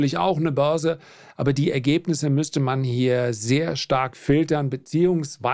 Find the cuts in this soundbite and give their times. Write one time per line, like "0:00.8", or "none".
none